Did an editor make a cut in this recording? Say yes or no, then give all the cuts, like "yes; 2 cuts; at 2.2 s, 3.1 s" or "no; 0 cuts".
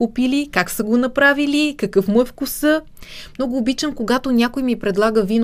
no; 0 cuts